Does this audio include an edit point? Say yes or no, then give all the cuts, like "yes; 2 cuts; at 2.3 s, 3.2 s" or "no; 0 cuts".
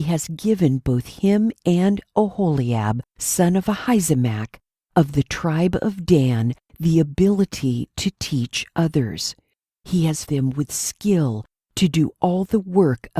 yes; 2 cuts; at 3.1 s, 10.3 s